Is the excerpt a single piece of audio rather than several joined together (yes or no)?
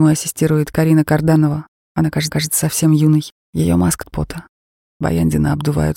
no